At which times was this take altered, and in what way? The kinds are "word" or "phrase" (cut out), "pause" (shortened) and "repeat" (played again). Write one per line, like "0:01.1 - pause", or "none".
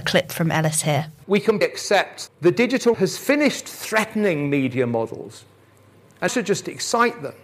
0:01.6 - word
0:02.3 - word
0:02.9 - word
0:06.3 - word

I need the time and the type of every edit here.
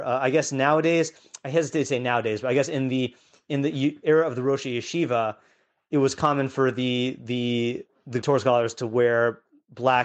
0:08.2 - word

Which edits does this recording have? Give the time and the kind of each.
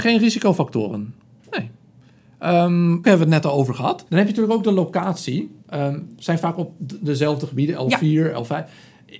0:03.0 - word
0:04.1 - pause

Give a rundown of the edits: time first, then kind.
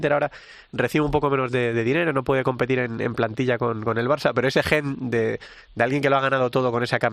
none

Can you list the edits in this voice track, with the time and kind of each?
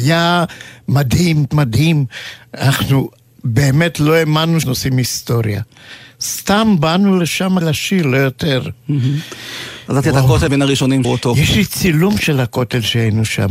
0:01.5 - word
0:04.6 - word
0:07.6 - word
0:10.0 - word
0:10.5 - word
0:11.0 - word

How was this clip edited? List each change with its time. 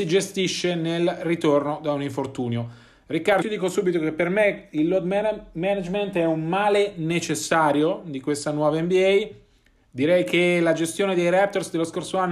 0:03.4 - word

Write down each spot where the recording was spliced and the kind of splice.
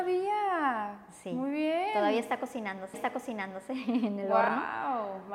0:02.9 - repeat

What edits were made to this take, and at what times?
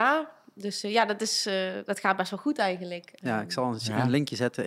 none

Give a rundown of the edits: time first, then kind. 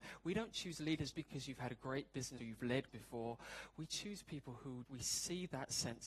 0:01.1 - word
0:02.4 - word
0:02.9 - word
0:04.9 - word

